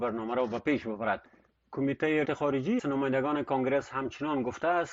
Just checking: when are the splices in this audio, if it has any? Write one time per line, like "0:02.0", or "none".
0:02.2
0:02.8